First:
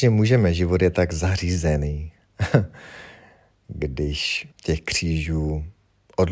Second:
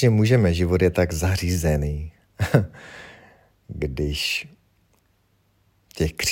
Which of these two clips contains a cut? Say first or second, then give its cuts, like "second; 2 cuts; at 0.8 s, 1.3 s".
first; 1 cut; at 4.5 s